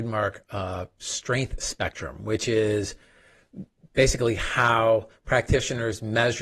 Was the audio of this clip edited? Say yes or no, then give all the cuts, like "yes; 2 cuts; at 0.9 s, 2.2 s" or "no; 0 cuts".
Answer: no; 0 cuts